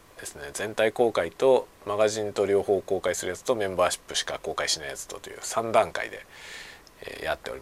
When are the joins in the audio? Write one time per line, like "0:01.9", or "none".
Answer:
0:01.7